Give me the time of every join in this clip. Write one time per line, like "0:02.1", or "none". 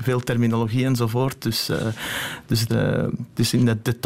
0:02.7